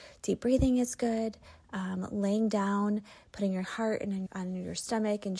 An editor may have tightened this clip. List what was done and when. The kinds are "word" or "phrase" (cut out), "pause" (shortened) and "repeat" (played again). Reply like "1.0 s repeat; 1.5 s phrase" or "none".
3.6 s phrase; 4.3 s word